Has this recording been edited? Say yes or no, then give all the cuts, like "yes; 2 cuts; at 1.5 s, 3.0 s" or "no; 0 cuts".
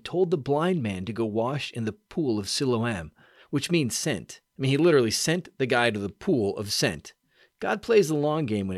no; 0 cuts